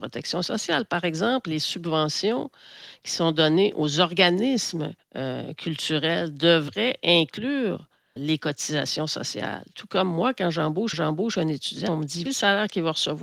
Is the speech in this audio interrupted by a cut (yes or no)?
yes